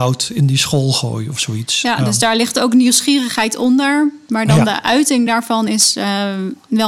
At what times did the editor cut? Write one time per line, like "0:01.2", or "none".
none